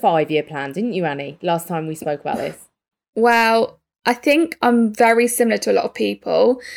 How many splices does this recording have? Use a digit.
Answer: 0